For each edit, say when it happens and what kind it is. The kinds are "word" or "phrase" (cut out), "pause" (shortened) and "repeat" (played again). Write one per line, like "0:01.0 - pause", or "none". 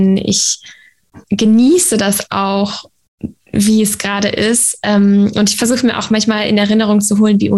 0:01.2 - pause
0:03.4 - pause

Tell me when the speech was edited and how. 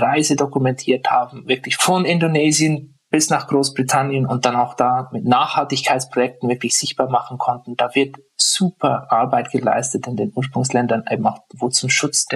none

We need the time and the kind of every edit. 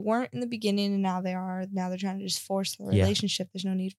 none

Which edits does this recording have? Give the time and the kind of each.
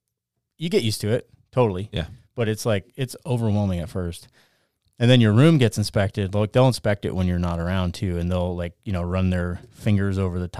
none

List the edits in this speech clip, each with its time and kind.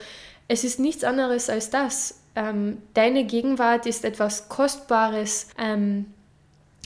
0:05.5 - pause

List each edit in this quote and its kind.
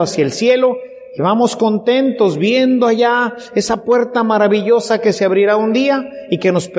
none

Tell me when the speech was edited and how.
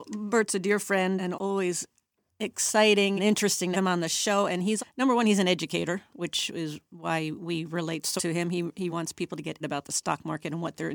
0:01.3 - word
0:03.2 - word
0:03.7 - word
0:04.8 - word
0:08.2 - word
0:08.9 - word
0:09.6 - word

